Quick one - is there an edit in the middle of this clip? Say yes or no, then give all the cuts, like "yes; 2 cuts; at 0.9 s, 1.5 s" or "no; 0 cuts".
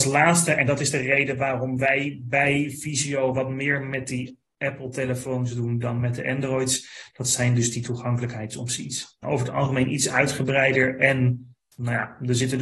yes; 1 cut; at 9.2 s